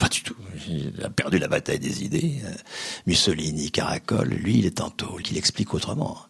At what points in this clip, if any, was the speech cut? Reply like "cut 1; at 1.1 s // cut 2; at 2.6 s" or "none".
cut 1; at 5.2 s